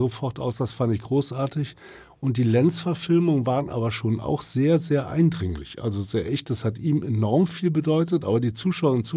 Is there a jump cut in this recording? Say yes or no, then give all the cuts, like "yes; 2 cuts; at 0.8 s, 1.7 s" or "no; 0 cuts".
no; 0 cuts